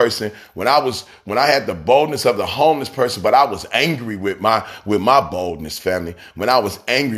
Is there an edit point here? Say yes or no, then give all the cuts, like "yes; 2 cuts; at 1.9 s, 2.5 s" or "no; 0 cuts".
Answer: no; 0 cuts